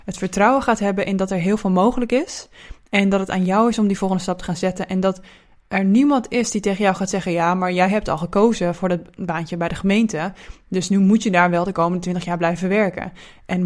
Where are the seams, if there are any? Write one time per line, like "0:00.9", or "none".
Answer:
none